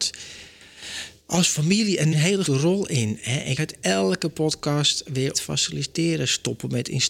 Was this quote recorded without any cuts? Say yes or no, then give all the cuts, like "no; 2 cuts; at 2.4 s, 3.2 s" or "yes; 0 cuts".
no; 5 cuts; at 1.2 s, 2.1 s, 2.4 s, 3.6 s, 5.3 s